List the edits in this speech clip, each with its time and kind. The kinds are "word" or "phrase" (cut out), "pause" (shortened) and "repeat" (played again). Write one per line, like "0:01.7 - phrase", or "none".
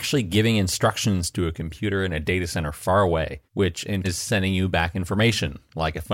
0:03.5 - pause
0:04.0 - word